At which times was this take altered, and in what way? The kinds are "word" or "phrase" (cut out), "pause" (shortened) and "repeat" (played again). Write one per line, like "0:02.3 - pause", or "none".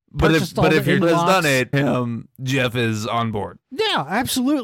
0:01.0 - word
0:01.7 - phrase
0:03.6 - pause